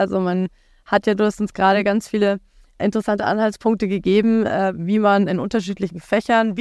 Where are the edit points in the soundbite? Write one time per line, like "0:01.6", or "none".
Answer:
none